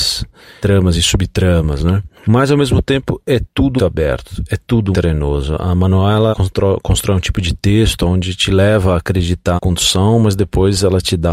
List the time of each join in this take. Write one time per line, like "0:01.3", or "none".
0:02.2
0:03.8
0:04.9
0:06.3
0:09.6